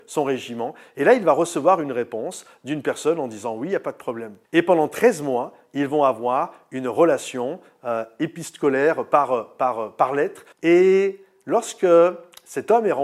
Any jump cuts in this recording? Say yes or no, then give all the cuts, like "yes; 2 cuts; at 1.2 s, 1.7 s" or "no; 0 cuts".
yes; 2 cuts; at 4.4 s, 10.5 s